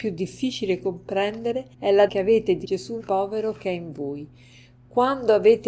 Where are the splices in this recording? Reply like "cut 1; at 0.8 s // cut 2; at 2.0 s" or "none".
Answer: cut 1; at 1.7 s // cut 2; at 2.1 s // cut 3; at 2.6 s // cut 4; at 3.0 s